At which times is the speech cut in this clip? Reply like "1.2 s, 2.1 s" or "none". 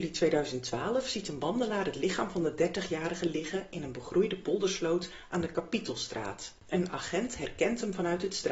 6.6 s